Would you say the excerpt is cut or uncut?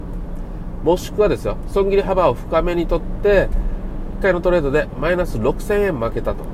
cut